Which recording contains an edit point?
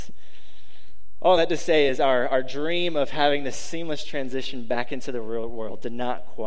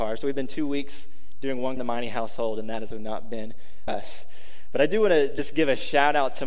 second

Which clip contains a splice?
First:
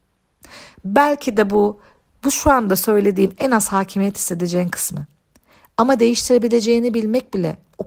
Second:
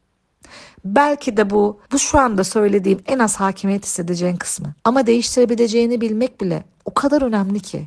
second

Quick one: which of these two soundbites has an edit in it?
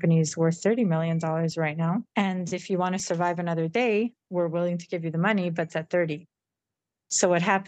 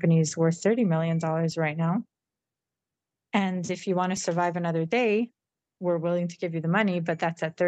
first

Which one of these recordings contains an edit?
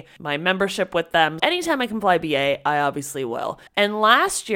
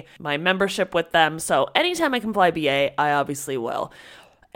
first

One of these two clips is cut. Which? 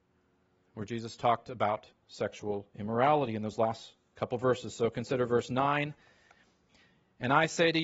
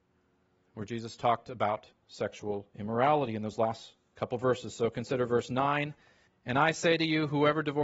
second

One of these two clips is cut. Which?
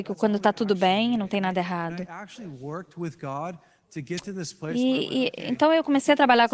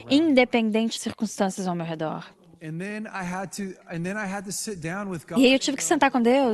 second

